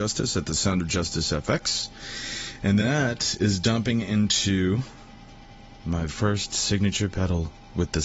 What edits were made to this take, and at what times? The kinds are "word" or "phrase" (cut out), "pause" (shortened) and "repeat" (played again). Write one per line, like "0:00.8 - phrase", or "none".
0:02.8 - word
0:06.1 - word